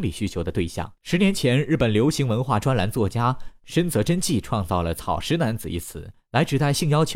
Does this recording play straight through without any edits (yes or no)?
no